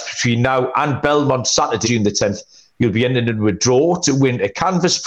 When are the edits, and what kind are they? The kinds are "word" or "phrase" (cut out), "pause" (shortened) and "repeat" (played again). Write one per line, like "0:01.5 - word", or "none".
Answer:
0:01.8 - word